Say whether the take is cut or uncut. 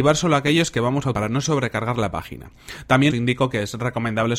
cut